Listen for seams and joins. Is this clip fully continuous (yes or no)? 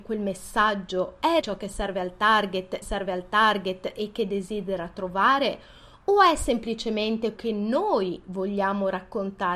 no